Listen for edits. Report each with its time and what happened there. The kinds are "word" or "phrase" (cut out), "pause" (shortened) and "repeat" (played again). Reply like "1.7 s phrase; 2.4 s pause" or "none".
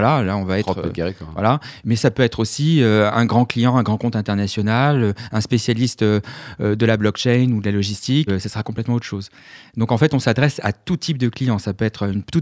8.3 s word